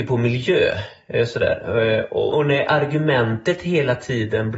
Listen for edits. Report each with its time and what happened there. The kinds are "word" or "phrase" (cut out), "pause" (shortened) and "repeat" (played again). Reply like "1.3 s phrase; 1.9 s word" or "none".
2.3 s word